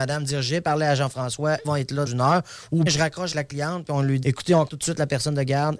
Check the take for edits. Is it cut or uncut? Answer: cut